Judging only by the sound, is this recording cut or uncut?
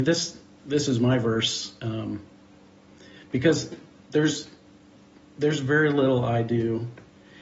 uncut